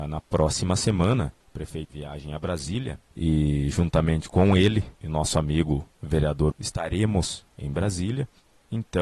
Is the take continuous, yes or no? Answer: no